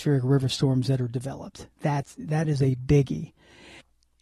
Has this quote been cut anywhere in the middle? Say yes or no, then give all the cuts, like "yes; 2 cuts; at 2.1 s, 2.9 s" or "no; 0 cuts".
yes; 1 cut; at 1.7 s